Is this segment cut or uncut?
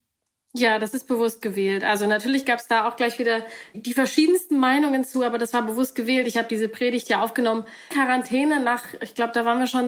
cut